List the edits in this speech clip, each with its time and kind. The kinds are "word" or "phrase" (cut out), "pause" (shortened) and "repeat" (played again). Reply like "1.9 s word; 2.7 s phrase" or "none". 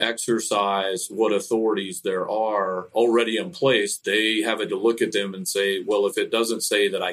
4.7 s word